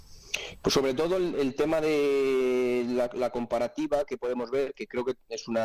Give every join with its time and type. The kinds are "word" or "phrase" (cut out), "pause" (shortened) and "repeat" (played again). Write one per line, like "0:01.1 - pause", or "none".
none